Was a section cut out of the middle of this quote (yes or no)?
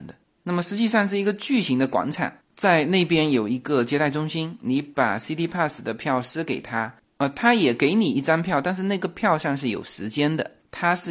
no